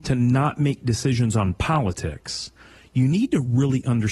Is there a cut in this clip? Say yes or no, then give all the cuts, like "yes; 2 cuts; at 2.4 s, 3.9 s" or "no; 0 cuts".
no; 0 cuts